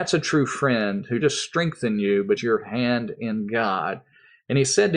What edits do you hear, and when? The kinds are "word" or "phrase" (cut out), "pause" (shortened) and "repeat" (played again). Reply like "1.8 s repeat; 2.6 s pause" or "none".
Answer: 1.2 s word; 2.4 s word